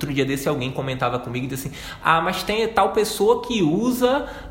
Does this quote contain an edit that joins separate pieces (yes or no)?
no